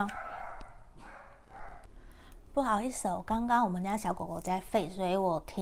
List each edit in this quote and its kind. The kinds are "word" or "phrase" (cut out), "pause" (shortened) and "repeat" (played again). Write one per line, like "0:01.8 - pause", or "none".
none

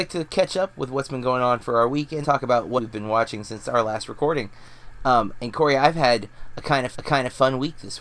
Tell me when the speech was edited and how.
0:02.2 - word
0:02.8 - word
0:06.9 - repeat

